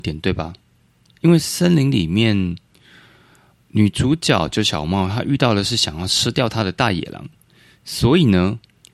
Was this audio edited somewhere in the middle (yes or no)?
no